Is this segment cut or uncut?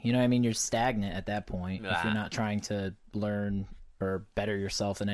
uncut